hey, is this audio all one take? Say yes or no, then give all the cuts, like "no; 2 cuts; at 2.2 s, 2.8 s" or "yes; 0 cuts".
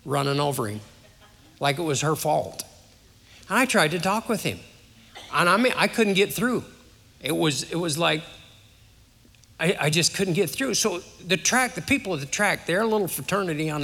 yes; 0 cuts